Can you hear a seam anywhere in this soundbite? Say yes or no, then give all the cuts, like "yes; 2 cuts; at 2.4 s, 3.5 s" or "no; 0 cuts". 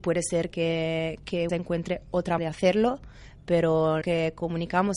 yes; 3 cuts; at 1.5 s, 2.4 s, 4.0 s